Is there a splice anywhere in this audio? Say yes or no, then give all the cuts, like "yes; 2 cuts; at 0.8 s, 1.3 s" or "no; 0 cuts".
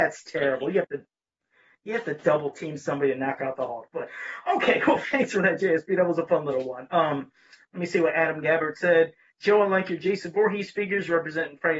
no; 0 cuts